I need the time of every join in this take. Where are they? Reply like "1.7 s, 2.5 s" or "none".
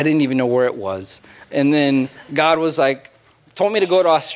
none